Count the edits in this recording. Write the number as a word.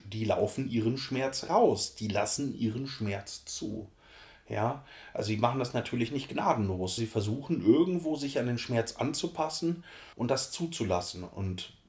two